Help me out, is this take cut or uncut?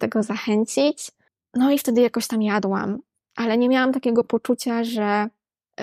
uncut